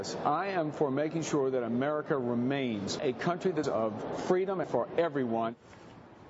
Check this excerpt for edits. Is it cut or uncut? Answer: cut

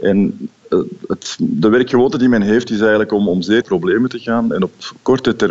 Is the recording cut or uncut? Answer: cut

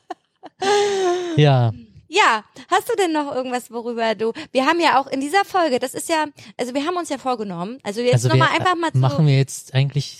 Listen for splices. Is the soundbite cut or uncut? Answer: uncut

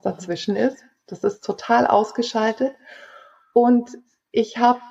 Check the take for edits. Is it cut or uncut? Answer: uncut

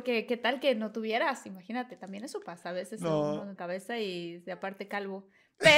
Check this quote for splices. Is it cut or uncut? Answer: cut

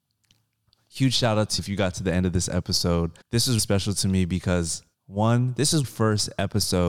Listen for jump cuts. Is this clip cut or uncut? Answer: cut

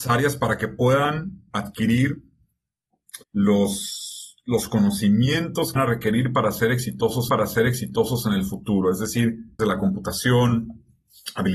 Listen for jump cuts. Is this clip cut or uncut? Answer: cut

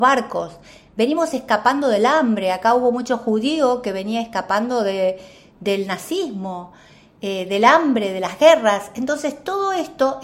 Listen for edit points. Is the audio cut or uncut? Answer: uncut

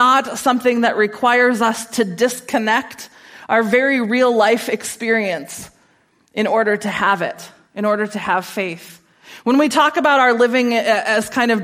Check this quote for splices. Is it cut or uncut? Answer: uncut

